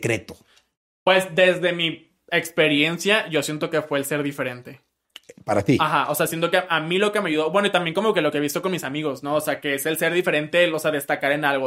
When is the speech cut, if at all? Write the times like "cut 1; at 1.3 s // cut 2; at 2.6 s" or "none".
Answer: none